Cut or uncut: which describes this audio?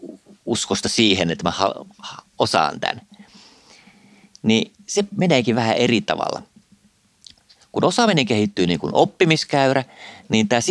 uncut